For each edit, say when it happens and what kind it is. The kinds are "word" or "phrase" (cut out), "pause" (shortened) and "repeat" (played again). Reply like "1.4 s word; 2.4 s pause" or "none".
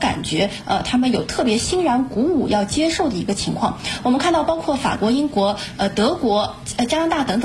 none

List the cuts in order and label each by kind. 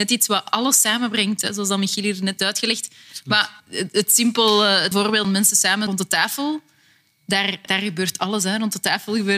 2.4 s word; 3.6 s pause; 4.9 s word; 5.2 s word; 5.9 s word; 7.7 s word

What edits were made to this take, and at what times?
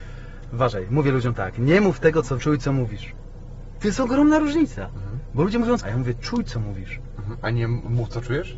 2.4 s word; 5.8 s word

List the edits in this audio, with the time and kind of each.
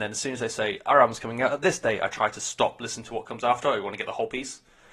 none

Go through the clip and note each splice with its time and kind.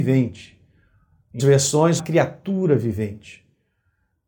1.4 s word; 2.0 s word

